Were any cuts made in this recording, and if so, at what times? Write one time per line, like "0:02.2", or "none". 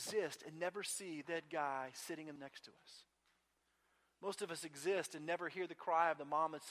0:01.2
0:02.4